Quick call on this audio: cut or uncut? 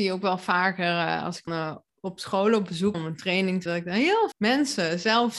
cut